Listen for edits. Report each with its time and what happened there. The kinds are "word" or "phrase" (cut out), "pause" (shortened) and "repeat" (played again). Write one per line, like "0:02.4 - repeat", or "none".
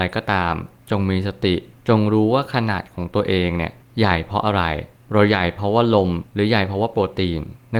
0:06.3 - pause